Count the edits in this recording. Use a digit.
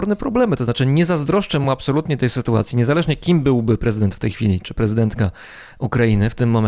0